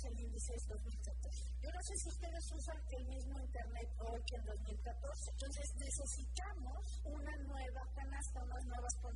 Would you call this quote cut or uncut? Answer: uncut